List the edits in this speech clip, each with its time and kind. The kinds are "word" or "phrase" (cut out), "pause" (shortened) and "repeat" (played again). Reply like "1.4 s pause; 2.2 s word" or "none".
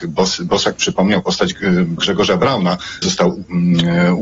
2.0 s word; 3.0 s word